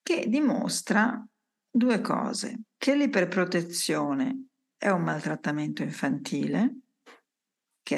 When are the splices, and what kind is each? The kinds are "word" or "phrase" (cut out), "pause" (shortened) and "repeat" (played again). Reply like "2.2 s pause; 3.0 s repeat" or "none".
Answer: none